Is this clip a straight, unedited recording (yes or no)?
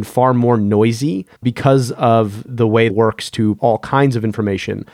no